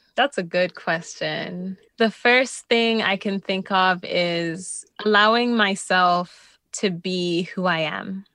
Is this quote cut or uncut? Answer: cut